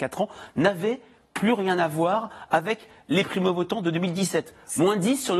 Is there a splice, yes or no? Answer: no